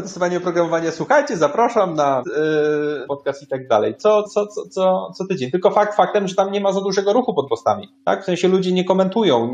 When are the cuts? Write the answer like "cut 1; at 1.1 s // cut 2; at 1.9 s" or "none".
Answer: cut 1; at 2.2 s // cut 2; at 3.1 s // cut 3; at 4.2 s // cut 4; at 7.5 s

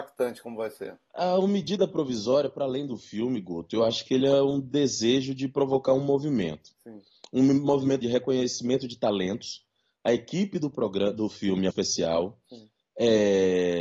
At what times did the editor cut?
cut 1; at 8.0 s // cut 2; at 11.7 s

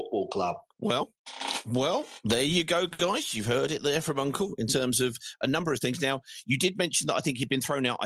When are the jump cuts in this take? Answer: none

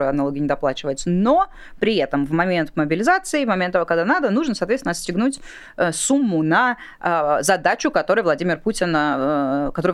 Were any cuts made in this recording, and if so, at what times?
none

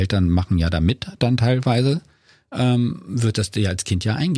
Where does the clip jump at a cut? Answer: none

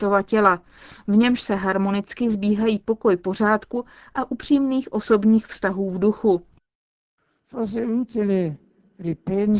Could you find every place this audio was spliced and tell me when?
none

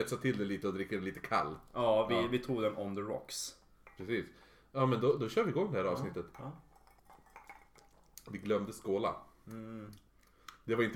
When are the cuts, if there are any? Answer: none

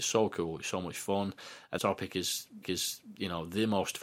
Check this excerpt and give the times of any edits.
cut 1; at 1.8 s // cut 2; at 2.6 s

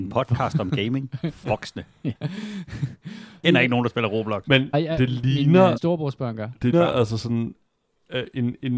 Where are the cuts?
cut 1; at 1.4 s // cut 2; at 2.1 s // cut 3; at 3.4 s // cut 4; at 4.7 s // cut 5; at 5.8 s // cut 6; at 6.7 s

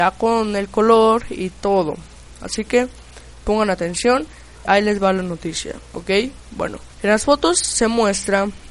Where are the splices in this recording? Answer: cut 1; at 4.7 s // cut 2; at 6.9 s

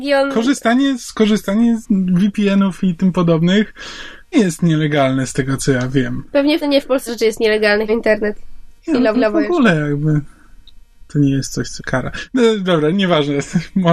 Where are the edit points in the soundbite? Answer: cut 1; at 1.8 s // cut 2; at 4.3 s // cut 3; at 6.6 s // cut 4; at 7.1 s // cut 5; at 7.9 s // cut 6; at 9.1 s // cut 7; at 11.1 s // cut 8; at 11.8 s

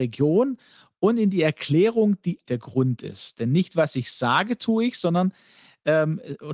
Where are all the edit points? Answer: cut 1; at 2.5 s

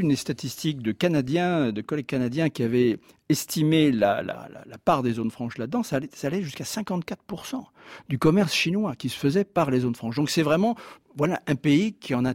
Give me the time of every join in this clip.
none

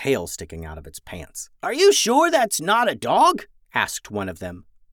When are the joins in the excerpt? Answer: cut 1; at 1.6 s

